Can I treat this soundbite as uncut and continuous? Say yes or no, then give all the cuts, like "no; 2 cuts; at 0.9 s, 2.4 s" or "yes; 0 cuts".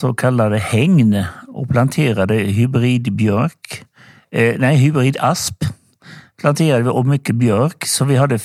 yes; 0 cuts